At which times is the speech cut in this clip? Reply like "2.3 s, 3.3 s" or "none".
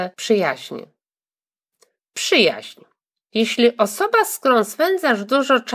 none